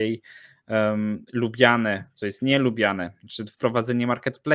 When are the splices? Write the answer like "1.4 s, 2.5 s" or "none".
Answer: none